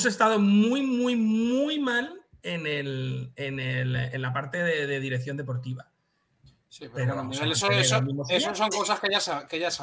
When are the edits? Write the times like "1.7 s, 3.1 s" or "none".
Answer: none